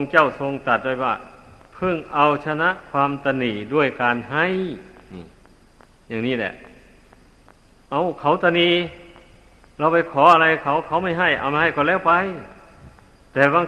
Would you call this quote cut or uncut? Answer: uncut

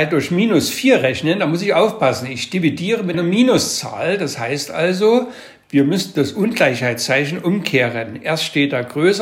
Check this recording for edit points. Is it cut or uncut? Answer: cut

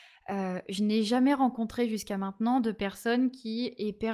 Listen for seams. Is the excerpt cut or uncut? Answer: uncut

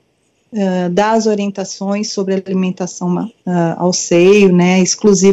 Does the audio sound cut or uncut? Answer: uncut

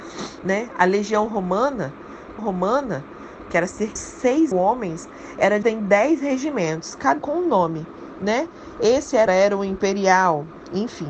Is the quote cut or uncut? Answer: cut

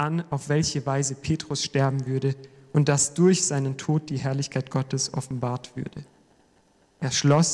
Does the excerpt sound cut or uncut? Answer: uncut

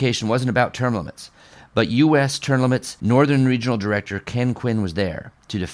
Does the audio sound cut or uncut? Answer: uncut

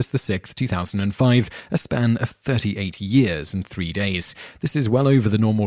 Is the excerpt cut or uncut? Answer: uncut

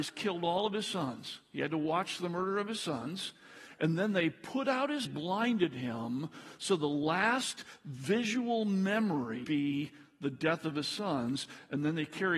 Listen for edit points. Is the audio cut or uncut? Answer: cut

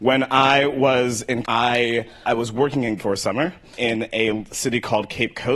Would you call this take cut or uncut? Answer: cut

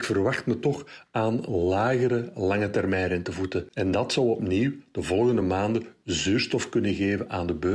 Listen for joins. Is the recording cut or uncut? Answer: uncut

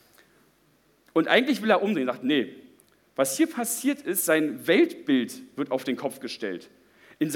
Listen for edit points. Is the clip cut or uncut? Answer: uncut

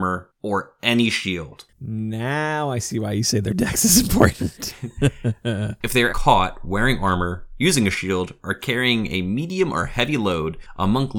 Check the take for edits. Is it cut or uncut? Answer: cut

